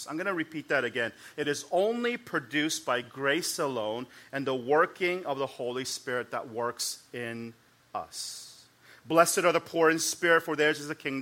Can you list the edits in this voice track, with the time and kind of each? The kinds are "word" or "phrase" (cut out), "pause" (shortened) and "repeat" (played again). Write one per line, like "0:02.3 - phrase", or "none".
none